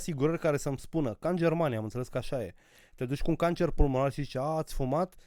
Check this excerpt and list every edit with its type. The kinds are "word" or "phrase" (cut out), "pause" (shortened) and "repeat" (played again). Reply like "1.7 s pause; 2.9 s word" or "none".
none